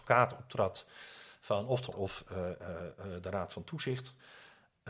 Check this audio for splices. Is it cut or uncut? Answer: cut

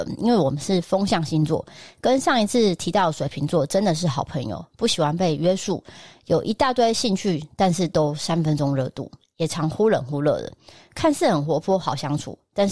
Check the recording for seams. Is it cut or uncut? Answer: uncut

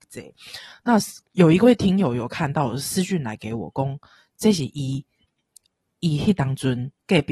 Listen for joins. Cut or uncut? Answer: cut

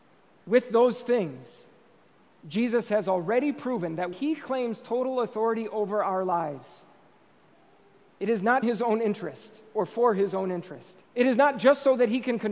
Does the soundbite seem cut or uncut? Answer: cut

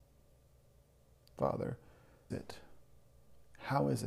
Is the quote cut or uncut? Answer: cut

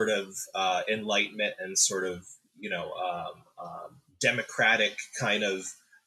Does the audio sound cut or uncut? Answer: uncut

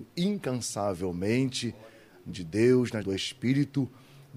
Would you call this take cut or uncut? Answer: cut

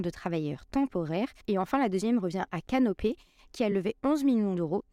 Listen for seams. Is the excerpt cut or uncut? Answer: uncut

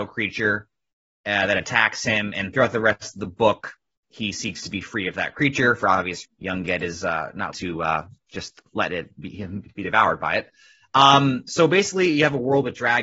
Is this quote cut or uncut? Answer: cut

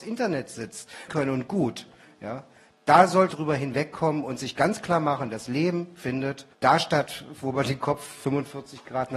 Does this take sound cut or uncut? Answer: cut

